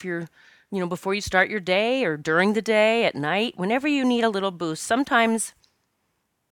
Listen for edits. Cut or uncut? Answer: uncut